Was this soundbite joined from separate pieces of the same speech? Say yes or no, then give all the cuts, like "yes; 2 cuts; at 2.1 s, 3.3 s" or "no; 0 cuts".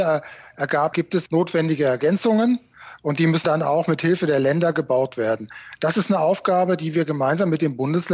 yes; 3 cuts; at 0.9 s, 1.3 s, 3.4 s